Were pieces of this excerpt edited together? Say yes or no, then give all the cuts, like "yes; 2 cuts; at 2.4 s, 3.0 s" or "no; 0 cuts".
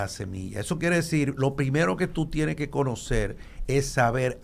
no; 0 cuts